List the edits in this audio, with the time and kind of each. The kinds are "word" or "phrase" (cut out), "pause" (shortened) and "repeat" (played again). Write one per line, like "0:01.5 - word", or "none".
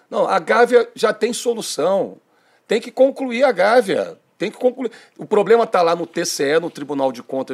none